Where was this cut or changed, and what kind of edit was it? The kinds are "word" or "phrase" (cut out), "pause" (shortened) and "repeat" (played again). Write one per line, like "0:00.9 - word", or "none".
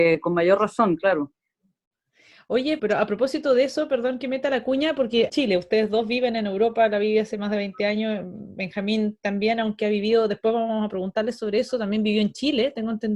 0:02.8 - word
0:05.3 - phrase